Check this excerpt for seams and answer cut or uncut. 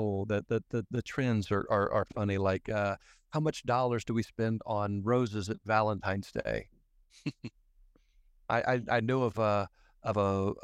uncut